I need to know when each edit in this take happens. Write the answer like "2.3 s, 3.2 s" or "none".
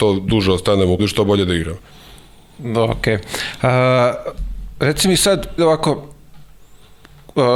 1.0 s, 5.6 s

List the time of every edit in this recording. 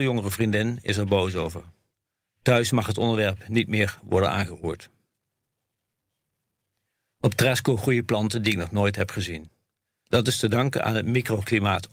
none

